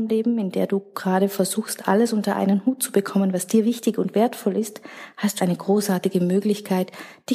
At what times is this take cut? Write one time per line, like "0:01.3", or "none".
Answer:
0:05.4